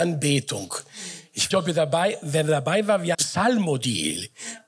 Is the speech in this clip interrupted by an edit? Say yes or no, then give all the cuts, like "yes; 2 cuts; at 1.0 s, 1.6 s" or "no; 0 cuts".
yes; 2 cuts; at 1.5 s, 3.1 s